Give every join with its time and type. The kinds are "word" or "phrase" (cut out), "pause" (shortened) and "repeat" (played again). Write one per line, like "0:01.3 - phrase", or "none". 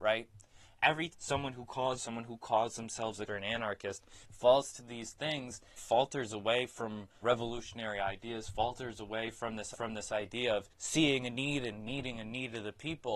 0:01.1 - word
0:02.0 - phrase
0:03.3 - phrase
0:04.2 - pause
0:05.8 - word
0:07.2 - word
0:09.7 - repeat
0:10.7 - pause

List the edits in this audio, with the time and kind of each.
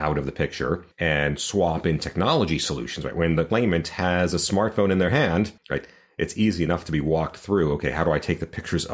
0:00.9 - pause
0:05.6 - pause

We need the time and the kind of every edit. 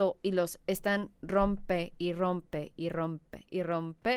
none

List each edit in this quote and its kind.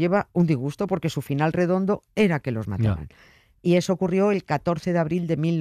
none

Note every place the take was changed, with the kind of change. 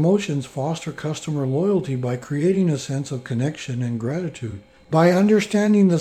none

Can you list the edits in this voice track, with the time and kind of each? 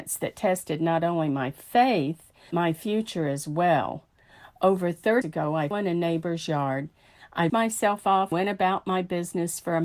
0:02.5 - word
0:05.2 - word
0:05.7 - word
0:07.5 - word
0:08.3 - word

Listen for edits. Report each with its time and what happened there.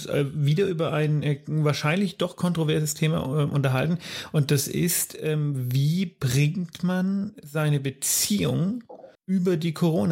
0:09.1 - pause

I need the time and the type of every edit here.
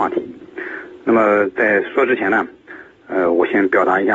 none

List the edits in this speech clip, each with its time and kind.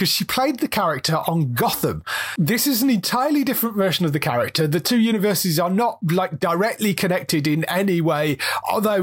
none

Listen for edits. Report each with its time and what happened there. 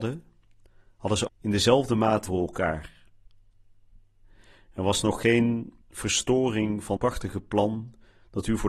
0:01.3 - word
0:02.3 - word
0:05.8 - pause
0:07.0 - word

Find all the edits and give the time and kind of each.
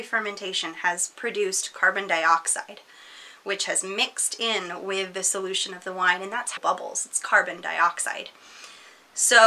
0:06.6 - phrase

